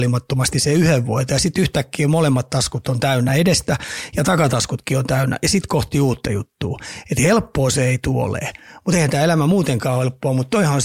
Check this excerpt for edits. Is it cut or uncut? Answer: uncut